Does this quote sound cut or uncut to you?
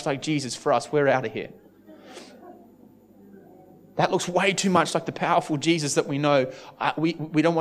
uncut